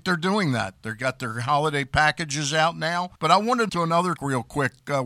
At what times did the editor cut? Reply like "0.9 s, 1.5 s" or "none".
3.2 s, 3.7 s, 4.2 s

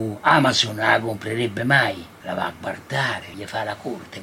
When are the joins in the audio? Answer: none

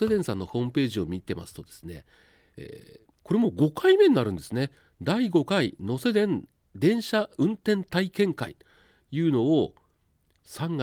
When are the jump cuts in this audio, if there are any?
3.2 s

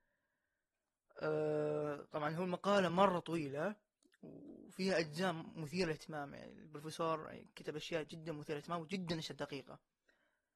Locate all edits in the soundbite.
none

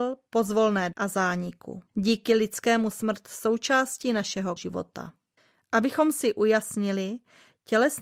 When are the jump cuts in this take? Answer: 0.9 s, 1.9 s, 2.9 s, 4.6 s, 5.4 s

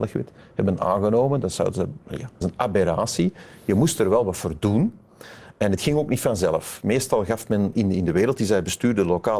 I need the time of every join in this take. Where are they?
2.0 s, 2.4 s, 7.7 s

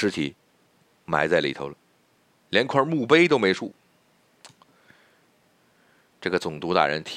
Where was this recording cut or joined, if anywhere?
none

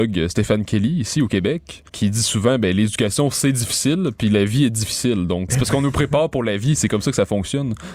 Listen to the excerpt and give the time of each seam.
1.9 s, 5.5 s

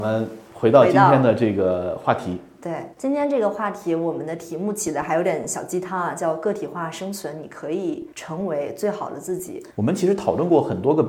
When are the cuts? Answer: 2.9 s, 8.1 s, 9.7 s

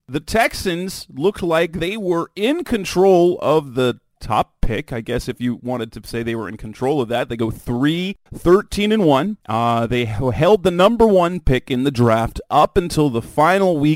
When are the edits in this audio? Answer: 8.3 s, 9.4 s

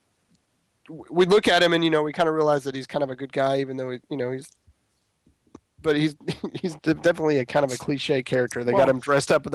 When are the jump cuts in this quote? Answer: 6.8 s

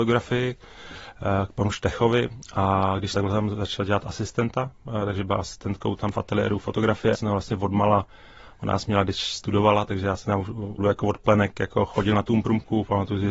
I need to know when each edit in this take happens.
3.1 s, 6.1 s, 7.1 s, 10.8 s

